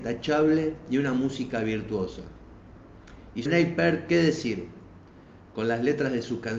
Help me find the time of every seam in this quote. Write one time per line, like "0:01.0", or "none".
0:03.5